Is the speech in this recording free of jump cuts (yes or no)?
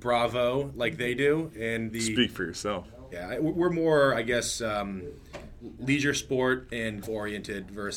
no